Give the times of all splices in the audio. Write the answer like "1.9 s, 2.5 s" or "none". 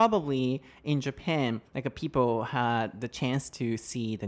1.7 s